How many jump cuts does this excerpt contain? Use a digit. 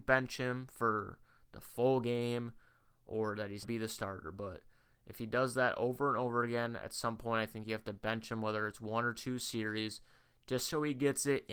1